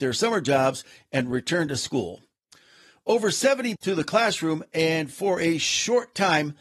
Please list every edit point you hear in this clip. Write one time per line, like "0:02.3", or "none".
0:03.8